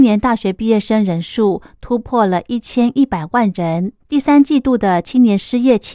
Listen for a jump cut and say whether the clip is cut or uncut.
cut